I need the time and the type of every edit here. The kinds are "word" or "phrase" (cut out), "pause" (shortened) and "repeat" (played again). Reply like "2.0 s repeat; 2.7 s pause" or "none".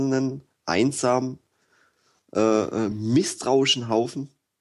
none